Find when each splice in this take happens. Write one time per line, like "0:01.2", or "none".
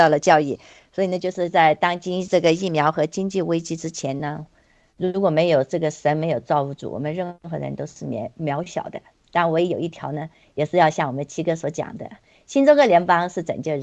none

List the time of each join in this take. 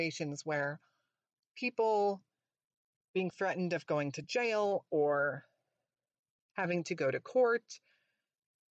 none

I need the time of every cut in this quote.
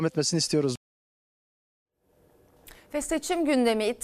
none

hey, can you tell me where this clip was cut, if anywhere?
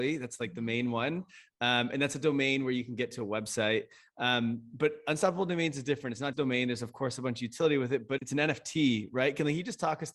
0:06.3
0:08.2

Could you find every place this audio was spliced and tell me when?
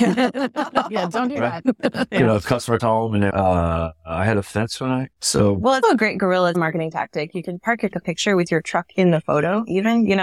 0:02.8
0:03.3
0:05.8
0:06.5
0:07.9

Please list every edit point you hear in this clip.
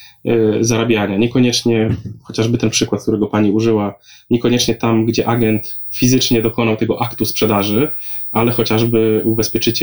none

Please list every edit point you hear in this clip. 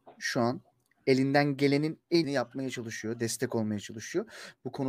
0:02.2

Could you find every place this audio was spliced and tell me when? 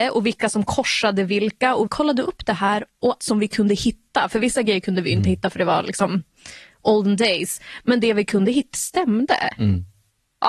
0:01.9
0:03.2
0:08.7

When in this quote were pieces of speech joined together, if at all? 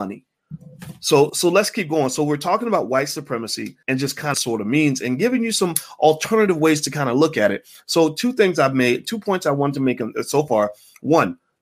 0:01.3
0:03.8
0:04.3

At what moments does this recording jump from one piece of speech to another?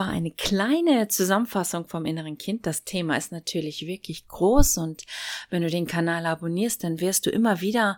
none

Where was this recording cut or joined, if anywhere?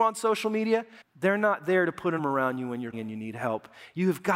0:01.0
0:02.2
0:02.9

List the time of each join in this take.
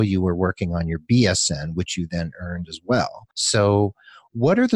0:03.3

